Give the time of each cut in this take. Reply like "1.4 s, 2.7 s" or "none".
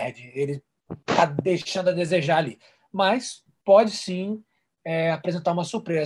none